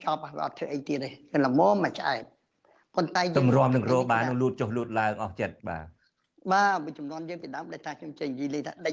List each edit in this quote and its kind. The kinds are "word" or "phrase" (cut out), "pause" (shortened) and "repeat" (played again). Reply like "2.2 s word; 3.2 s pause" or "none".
5.6 s pause